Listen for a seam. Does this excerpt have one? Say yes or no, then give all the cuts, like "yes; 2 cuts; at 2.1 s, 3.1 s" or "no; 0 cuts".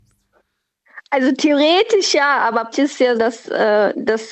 yes; 2 cuts; at 2.7 s, 3.1 s